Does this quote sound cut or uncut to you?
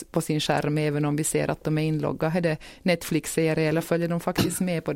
uncut